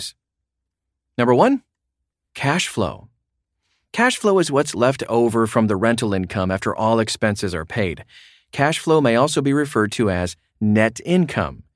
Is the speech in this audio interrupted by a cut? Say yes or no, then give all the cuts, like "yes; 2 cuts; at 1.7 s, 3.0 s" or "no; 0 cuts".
no; 0 cuts